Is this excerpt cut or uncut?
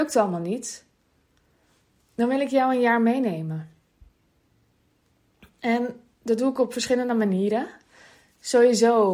uncut